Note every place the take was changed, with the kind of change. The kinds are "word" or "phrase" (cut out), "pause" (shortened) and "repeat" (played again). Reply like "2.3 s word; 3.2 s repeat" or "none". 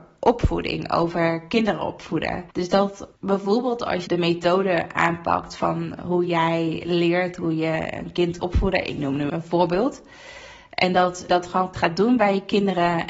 2.5 s pause; 3.2 s pause; 4.1 s phrase; 8.4 s word; 9.3 s word; 11.3 s word; 11.7 s word